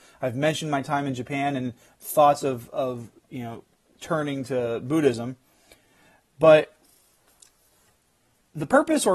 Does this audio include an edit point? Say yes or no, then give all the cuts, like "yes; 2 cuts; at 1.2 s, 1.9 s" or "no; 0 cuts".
no; 0 cuts